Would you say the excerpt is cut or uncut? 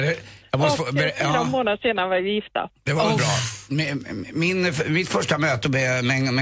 uncut